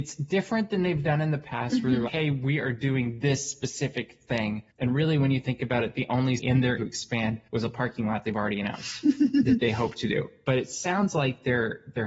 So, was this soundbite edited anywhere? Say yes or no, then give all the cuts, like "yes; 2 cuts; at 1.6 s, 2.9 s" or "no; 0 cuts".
yes; 5 cuts; at 2.1 s, 4.7 s, 6.4 s, 6.8 s, 7.5 s